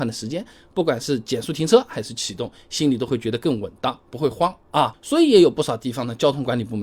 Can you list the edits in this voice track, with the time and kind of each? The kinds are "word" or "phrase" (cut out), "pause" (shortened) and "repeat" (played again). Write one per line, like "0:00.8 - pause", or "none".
none